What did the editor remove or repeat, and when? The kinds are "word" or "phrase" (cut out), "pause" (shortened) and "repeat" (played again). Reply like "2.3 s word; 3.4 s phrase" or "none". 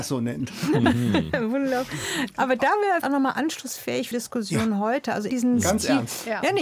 3.0 s word; 4.1 s word; 5.3 s word

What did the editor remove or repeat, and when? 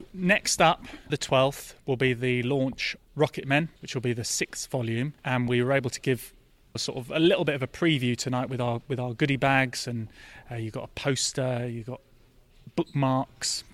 1.1 s word; 3.0 s word; 3.8 s pause; 5.2 s pause; 6.8 s word

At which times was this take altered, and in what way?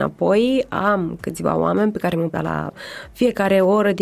2.3 s phrase

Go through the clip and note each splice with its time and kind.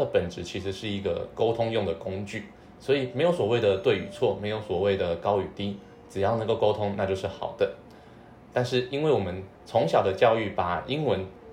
9.5 s pause

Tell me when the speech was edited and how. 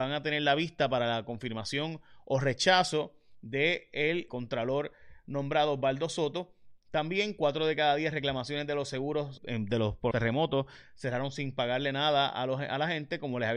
4.3 s word; 9.4 s word; 10.1 s word

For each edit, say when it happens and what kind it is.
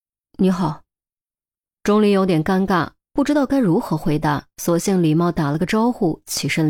4.5 s pause

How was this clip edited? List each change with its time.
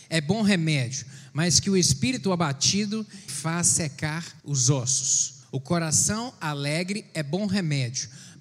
3.3 s word; 4.4 s pause; 5.4 s pause

